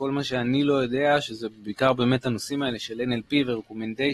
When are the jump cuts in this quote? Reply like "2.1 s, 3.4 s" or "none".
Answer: none